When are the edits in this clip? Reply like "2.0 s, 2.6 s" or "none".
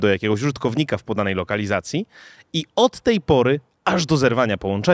none